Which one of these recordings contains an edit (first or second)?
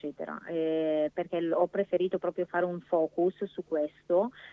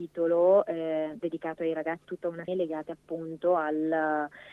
second